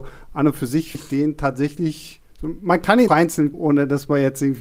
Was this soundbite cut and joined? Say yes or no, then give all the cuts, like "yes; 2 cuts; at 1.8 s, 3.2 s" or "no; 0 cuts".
yes; 3 cuts; at 0.9 s, 3.1 s, 3.5 s